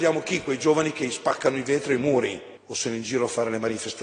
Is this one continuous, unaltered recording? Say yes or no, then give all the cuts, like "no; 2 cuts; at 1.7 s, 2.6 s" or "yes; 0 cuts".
no; 2 cuts; at 2.0 s, 2.6 s